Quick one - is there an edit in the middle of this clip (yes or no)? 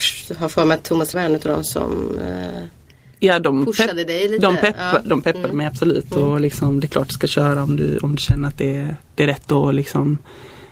yes